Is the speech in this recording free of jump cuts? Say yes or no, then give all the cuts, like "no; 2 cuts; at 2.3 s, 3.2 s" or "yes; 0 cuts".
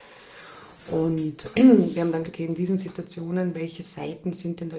no; 2 cuts; at 1.5 s, 2.2 s